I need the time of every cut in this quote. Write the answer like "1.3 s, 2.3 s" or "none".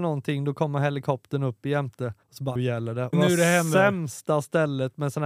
2.2 s, 2.6 s, 3.1 s